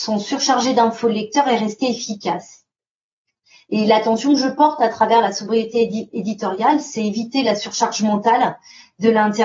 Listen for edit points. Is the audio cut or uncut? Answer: uncut